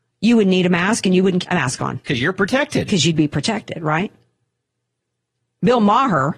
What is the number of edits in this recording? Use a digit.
1